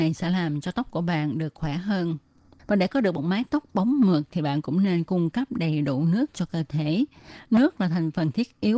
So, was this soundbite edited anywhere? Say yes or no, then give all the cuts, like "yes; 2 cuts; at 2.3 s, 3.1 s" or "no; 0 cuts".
no; 0 cuts